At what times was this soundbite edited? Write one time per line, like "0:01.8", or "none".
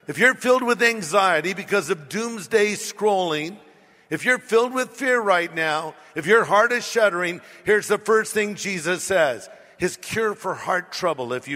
none